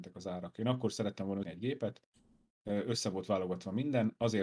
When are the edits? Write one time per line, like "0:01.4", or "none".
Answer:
0:01.4